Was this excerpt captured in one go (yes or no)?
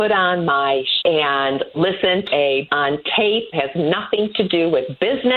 no